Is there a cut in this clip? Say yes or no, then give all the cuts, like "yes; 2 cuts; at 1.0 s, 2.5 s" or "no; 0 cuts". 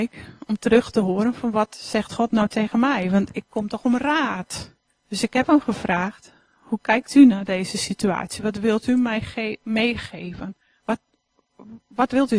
yes; 1 cut; at 4.9 s